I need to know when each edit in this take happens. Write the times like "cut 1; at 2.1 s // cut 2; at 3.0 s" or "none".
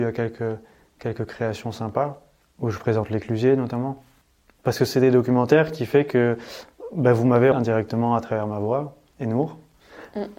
cut 1; at 7.5 s